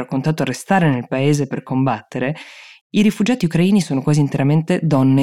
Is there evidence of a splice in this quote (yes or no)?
no